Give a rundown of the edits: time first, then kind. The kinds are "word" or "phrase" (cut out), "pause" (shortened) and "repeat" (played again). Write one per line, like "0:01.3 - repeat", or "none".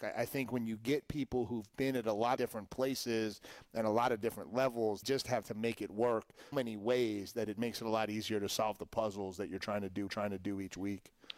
0:02.4 - word
0:05.0 - word
0:05.4 - word
0:06.5 - word
0:10.1 - repeat